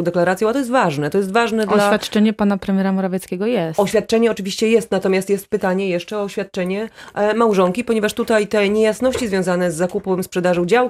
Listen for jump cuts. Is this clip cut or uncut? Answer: uncut